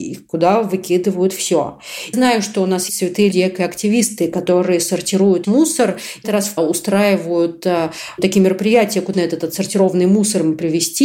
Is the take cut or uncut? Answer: cut